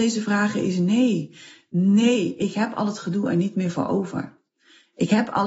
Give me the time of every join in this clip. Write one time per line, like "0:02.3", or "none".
none